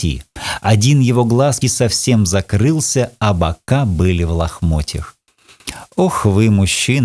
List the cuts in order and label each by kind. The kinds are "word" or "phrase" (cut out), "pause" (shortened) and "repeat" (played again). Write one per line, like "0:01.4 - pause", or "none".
0:01.6 - word